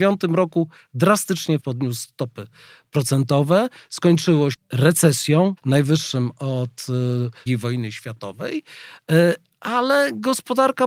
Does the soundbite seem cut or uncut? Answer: cut